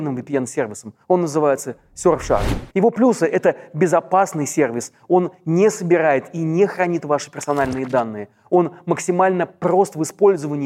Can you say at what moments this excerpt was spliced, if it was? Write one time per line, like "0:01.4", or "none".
0:02.7